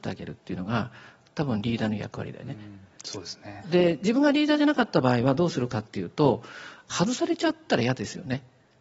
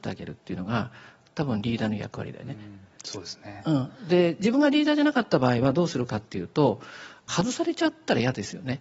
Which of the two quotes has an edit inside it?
first; 1 cut; at 3.6 s

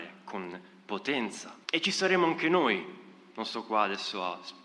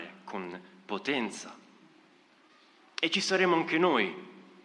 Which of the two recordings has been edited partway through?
first; 1 cut; at 1.6 s

